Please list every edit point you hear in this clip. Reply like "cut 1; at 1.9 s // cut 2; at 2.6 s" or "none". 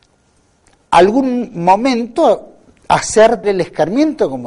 cut 1; at 3.4 s